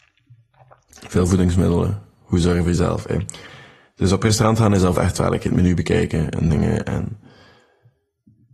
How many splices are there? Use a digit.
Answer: 1